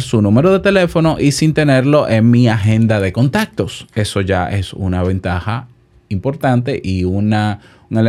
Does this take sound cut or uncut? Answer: uncut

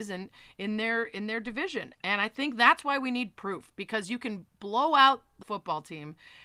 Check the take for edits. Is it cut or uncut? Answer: cut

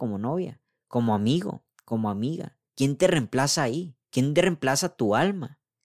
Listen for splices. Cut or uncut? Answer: cut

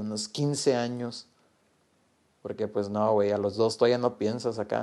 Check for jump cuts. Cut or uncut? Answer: uncut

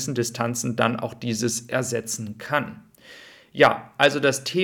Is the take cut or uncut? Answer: uncut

